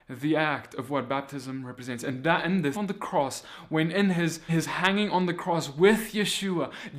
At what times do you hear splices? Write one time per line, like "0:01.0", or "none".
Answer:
0:02.7
0:04.5